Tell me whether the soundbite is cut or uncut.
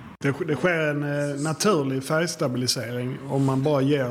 uncut